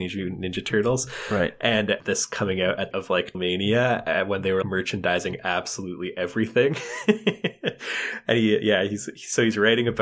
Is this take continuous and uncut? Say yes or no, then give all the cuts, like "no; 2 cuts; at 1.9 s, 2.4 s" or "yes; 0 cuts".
no; 4 cuts; at 2.0 s, 2.9 s, 3.3 s, 4.6 s